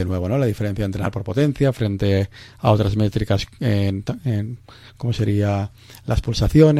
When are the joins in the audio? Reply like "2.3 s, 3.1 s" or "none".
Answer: none

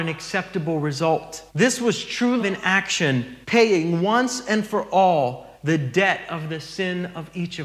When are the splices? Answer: 1.5 s, 2.4 s, 3.4 s, 5.5 s

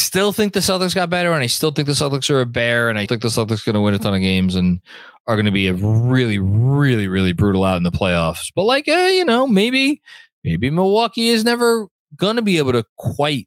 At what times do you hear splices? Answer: 3.1 s

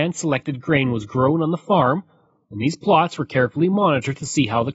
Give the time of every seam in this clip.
none

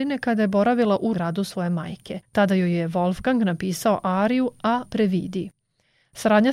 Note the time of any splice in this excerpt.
1.1 s, 2.2 s, 4.9 s

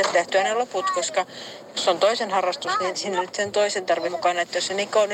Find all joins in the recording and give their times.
2.9 s, 4.0 s

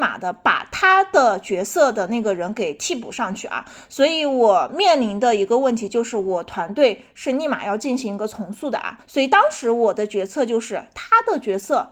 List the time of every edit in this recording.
9.0 s

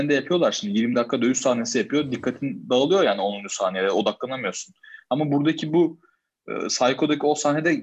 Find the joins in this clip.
none

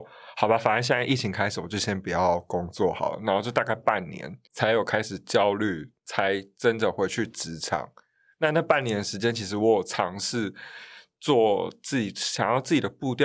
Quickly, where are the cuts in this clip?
4.4 s, 6.0 s

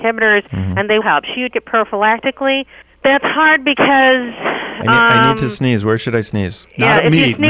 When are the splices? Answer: 1.0 s, 1.5 s, 2.8 s

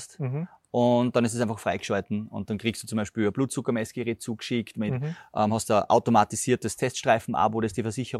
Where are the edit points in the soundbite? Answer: none

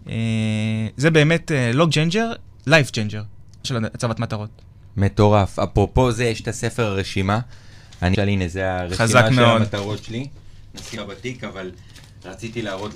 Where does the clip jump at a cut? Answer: 1.9 s, 3.6 s, 8.1 s, 11.0 s

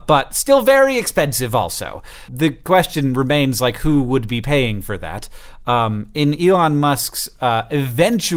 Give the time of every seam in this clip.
2.3 s

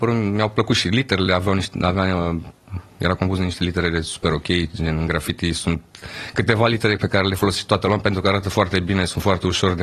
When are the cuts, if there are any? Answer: none

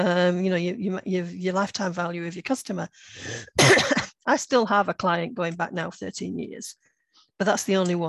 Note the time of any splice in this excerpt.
none

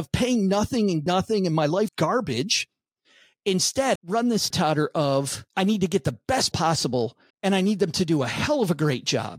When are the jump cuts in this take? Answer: 1.1 s, 1.9 s, 4.0 s, 4.5 s, 5.5 s, 6.5 s, 7.3 s

